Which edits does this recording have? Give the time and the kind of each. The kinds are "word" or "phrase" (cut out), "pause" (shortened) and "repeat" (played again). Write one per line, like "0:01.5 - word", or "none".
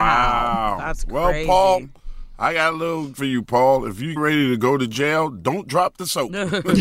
0:03.1 - word
0:04.2 - word